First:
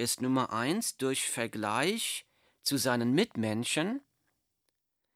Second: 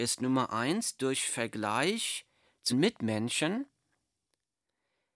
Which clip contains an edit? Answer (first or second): second